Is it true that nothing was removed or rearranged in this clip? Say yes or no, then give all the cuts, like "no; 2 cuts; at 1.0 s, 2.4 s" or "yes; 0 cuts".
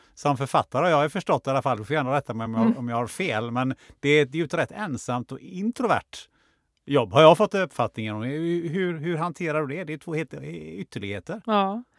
yes; 0 cuts